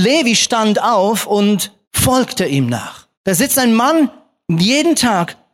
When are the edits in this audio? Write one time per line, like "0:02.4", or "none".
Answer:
0:01.8
0:03.1